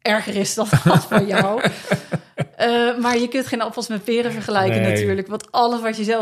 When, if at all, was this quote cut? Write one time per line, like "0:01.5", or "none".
none